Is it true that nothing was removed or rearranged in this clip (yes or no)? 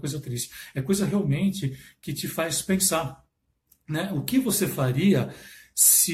yes